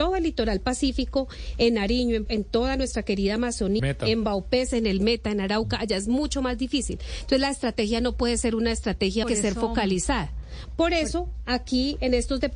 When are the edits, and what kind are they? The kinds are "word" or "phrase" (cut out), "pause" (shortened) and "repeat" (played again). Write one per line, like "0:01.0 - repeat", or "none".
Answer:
0:02.3 - word
0:03.8 - word
0:09.2 - phrase